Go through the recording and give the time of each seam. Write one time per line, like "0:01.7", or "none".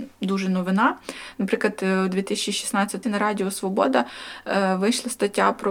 0:03.0